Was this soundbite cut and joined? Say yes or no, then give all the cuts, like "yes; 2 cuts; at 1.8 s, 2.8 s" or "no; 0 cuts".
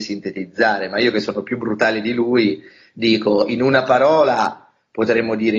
no; 0 cuts